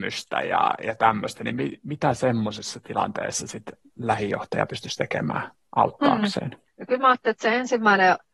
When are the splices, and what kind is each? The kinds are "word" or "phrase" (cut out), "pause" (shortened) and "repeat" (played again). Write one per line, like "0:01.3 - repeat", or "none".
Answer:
0:03.8 - pause
0:06.7 - pause